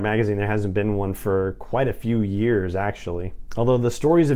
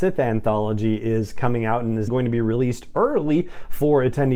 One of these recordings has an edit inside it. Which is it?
second; 1 cut; at 2.1 s

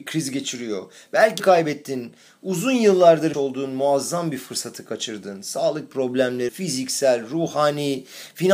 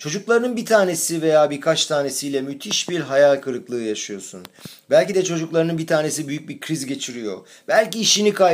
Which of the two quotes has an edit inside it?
first; 3 cuts; at 1.4 s, 3.3 s, 6.5 s

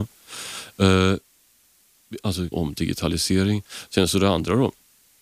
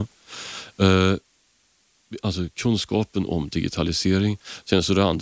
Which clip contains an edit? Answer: first; 1 cut; at 2.5 s

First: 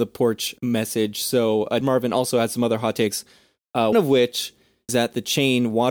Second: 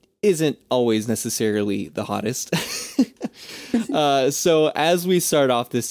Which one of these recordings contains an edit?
first; 3 cuts; at 1.8 s, 3.9 s, 4.9 s

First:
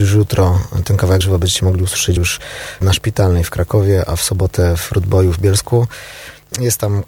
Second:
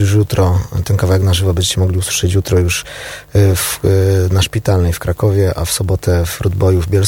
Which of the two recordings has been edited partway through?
first; 3 cuts; at 1.2 s, 2.2 s, 2.8 s

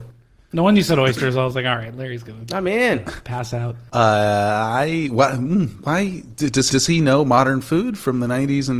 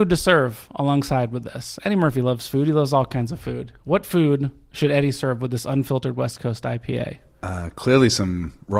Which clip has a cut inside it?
first; 1 cut; at 6.7 s

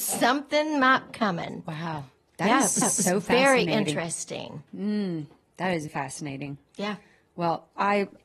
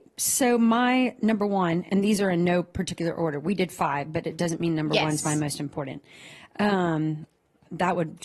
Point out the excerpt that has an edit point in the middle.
first; 5 cuts; at 1.1 s, 2.8 s, 4.7 s, 5.9 s, 6.7 s

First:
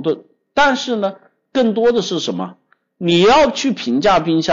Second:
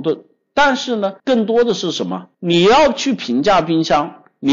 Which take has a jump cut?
second; 2 cuts; at 1.2 s, 2.3 s

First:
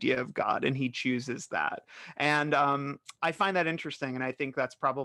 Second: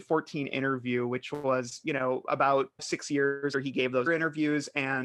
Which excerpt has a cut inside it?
second; 3 cuts; at 2.8 s, 3.5 s, 4.1 s

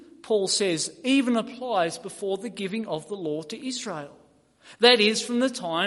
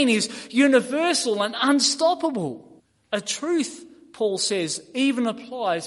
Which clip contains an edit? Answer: second; 1 cut; at 2.8 s

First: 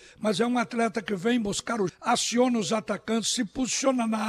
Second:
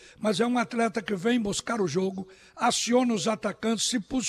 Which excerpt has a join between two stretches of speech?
first; 1 cut; at 1.9 s

